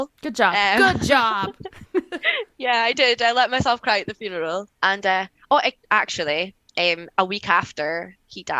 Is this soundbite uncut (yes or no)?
no